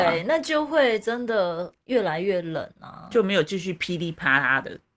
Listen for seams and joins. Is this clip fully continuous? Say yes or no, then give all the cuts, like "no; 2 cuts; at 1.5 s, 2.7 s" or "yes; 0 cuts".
yes; 0 cuts